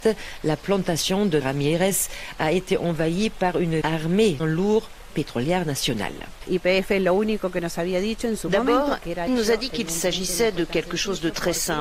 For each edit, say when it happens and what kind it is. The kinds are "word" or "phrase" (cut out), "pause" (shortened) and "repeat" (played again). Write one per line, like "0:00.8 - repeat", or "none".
0:01.4 - word
0:03.8 - word
0:04.4 - word
0:05.1 - phrase
0:09.3 - word